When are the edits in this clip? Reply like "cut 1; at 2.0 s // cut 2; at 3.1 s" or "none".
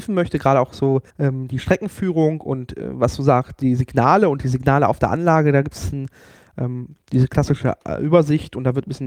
cut 1; at 1.1 s